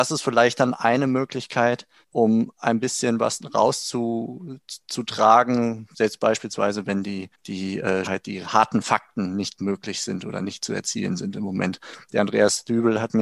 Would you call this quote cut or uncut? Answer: cut